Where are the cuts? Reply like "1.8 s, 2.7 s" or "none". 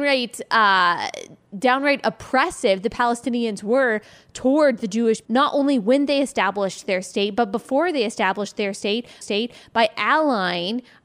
5.2 s, 9.2 s